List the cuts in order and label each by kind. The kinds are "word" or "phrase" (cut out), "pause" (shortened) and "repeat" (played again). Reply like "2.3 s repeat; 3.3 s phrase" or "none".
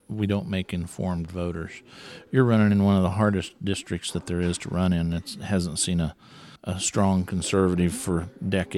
6.6 s pause